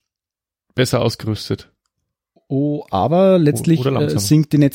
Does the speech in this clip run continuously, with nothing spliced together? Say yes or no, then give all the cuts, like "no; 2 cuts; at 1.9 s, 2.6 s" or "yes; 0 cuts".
yes; 0 cuts